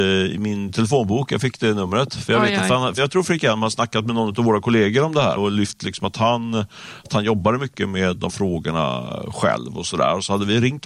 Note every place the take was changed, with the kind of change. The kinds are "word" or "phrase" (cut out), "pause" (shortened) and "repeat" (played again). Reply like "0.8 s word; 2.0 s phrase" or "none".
3.0 s word; 5.4 s word; 8.3 s word